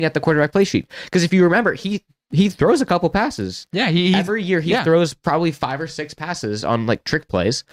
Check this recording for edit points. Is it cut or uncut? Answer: uncut